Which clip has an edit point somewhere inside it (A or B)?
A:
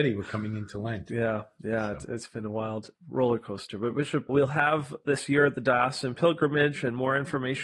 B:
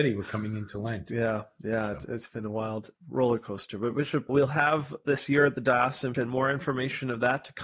B